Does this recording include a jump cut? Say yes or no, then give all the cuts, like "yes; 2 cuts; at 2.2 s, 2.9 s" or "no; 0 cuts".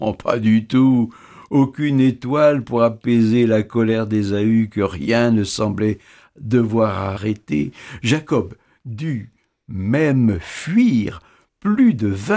no; 0 cuts